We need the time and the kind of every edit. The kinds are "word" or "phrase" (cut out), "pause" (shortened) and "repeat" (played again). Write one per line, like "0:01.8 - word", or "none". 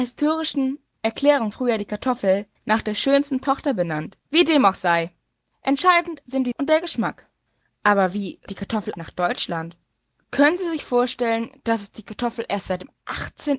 0:01.5 - phrase
0:02.6 - pause
0:04.2 - pause
0:06.5 - word
0:08.5 - word
0:09.0 - word